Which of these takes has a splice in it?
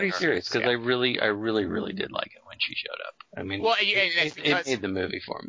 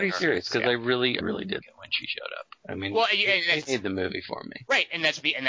second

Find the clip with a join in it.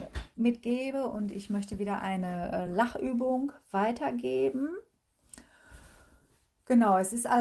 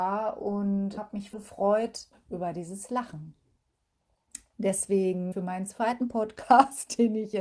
second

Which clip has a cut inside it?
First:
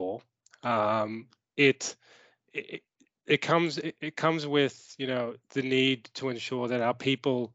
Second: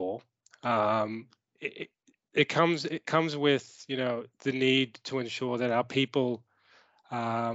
second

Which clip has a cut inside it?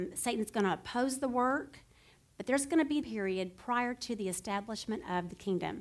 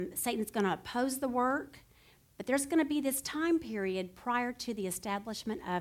first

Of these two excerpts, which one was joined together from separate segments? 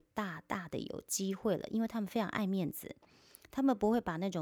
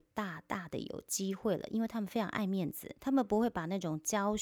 second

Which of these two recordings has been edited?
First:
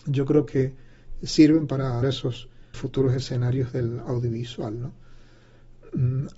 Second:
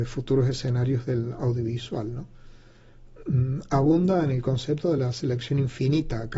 first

